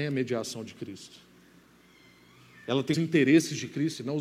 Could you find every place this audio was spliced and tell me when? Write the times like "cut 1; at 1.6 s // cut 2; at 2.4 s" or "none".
cut 1; at 2.9 s